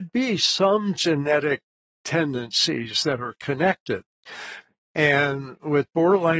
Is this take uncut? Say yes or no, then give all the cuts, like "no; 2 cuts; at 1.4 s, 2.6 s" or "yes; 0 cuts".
yes; 0 cuts